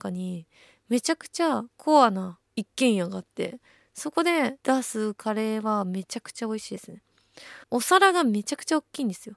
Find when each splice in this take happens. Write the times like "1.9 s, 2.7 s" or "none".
2.5 s, 4.6 s, 7.6 s